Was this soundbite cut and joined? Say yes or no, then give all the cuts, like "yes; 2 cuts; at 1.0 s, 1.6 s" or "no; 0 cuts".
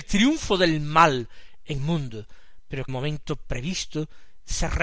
yes; 2 cuts; at 1.8 s, 2.9 s